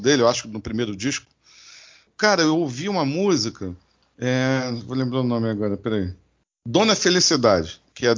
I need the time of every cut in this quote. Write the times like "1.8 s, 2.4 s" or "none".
none